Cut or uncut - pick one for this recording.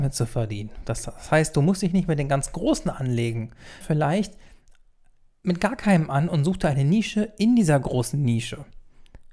cut